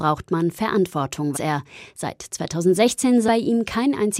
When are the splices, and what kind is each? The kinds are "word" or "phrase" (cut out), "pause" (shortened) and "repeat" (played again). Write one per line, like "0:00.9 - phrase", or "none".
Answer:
0:01.3 - word
0:03.3 - word